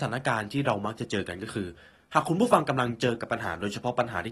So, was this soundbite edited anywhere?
no; 0 cuts

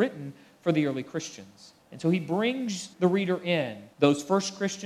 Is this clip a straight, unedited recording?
no; 3 cuts; at 1.8 s, 2.9 s, 3.9 s

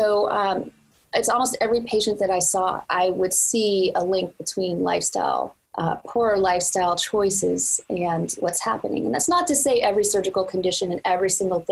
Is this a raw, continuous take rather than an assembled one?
no; 2 cuts; at 2.9 s, 5.7 s

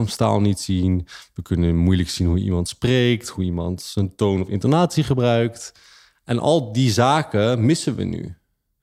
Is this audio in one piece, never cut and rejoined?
yes; 0 cuts

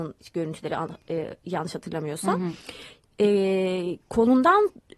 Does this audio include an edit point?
no; 0 cuts

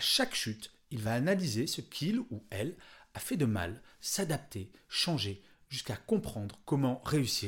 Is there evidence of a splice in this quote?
no; 0 cuts

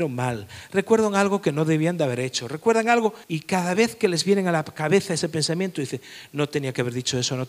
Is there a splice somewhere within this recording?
yes; 1 cut; at 3.2 s

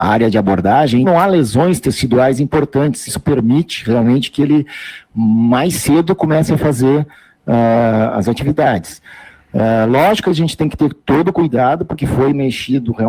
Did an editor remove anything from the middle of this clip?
yes; 2 cuts; at 1.0 s, 3.1 s

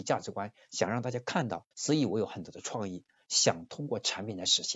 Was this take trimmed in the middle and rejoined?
yes; 1 cut; at 1.7 s

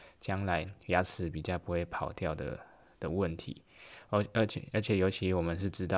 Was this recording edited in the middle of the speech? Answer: no; 0 cuts

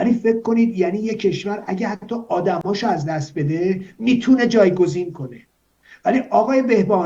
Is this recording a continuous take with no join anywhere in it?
yes; 0 cuts

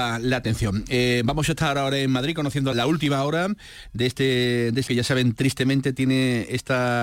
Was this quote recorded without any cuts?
no; 2 cuts; at 2.7 s, 4.9 s

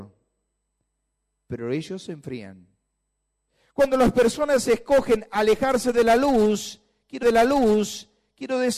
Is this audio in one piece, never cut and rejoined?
no; 1 cut; at 7.2 s

